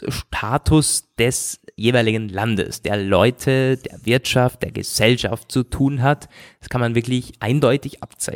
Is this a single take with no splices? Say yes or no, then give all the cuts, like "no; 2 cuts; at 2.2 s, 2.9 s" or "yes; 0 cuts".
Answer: yes; 0 cuts